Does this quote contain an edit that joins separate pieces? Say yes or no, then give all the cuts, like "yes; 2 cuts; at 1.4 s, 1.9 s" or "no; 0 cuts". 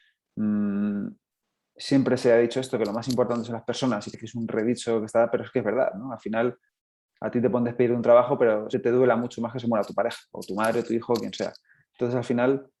yes; 2 cuts; at 4.1 s, 8.7 s